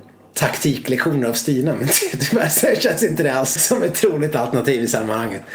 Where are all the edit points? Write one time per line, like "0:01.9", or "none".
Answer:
0:03.6